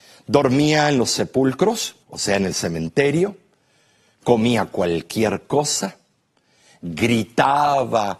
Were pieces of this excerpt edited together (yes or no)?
yes